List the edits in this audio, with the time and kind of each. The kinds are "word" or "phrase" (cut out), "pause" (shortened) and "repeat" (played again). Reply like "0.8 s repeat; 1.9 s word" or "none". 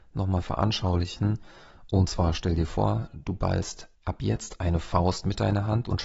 3.9 s pause